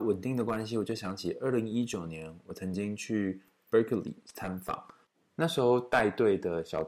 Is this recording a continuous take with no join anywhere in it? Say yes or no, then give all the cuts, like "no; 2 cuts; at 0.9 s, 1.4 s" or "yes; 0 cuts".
yes; 0 cuts